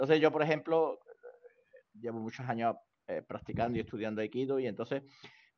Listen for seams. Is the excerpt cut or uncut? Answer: uncut